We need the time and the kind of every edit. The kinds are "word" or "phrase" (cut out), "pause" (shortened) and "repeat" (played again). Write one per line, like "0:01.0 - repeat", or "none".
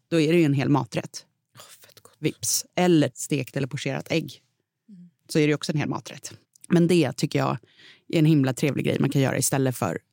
0:03.1 - phrase
0:05.2 - pause
0:06.4 - pause